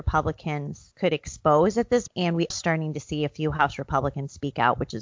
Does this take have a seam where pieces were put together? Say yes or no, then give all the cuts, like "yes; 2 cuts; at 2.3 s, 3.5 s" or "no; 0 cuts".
yes; 3 cuts; at 0.9 s, 2.1 s, 2.5 s